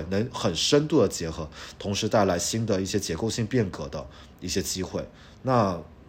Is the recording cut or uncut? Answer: uncut